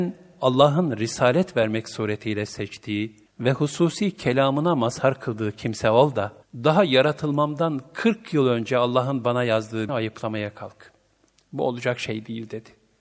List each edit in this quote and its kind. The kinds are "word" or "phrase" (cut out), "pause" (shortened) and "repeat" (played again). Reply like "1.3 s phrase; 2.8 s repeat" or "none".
3.3 s pause; 6.4 s pause; 9.9 s phrase